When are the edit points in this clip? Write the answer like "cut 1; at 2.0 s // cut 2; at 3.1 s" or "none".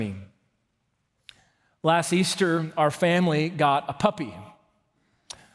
none

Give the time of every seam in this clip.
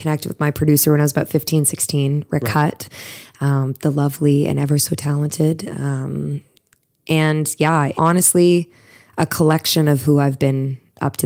cut 1; at 7.9 s

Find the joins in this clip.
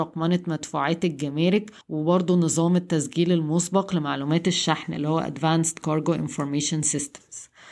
cut 1; at 1.8 s

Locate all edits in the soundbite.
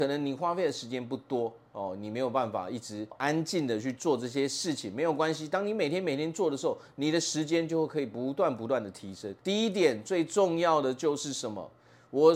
cut 1; at 9.4 s

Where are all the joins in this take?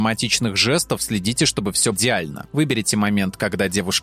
cut 1; at 1.9 s

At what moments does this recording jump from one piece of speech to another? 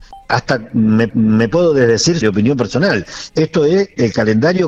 cut 1; at 1.1 s // cut 2; at 2.2 s

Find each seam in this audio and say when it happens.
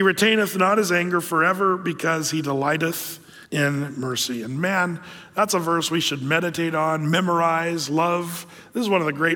cut 1; at 3.5 s

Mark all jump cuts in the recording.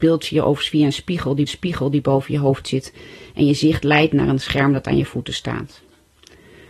cut 1; at 1.5 s

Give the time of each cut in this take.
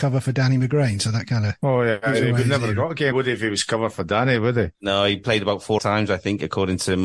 cut 1; at 3.1 s // cut 2; at 4.7 s // cut 3; at 5.8 s

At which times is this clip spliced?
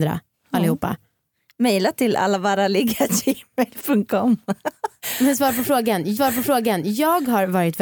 cut 1; at 6.2 s

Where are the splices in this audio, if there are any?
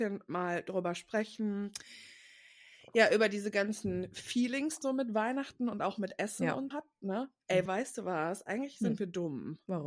cut 1; at 4.8 s // cut 2; at 6.7 s // cut 3; at 7.7 s

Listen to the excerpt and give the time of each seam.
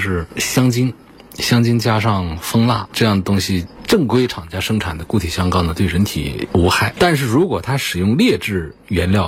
none

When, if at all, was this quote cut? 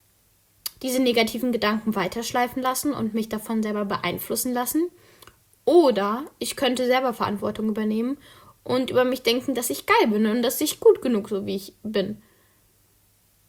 none

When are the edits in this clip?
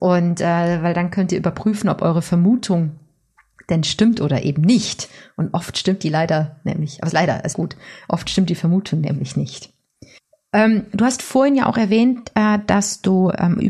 cut 1; at 7.1 s // cut 2; at 7.5 s // cut 3; at 10.2 s

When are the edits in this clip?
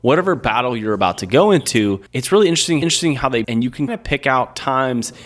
cut 1; at 2.1 s // cut 2; at 2.8 s // cut 3; at 3.4 s // cut 4; at 3.9 s

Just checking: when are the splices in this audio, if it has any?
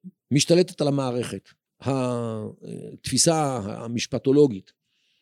cut 1; at 1.7 s

